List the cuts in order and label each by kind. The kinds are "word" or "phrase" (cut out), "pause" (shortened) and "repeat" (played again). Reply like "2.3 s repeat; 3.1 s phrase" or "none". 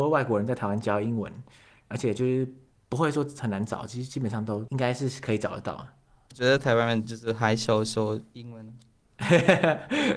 none